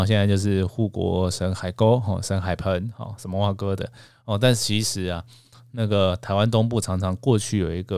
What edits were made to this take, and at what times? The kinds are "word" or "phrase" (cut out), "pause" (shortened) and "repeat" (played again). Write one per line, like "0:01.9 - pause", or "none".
none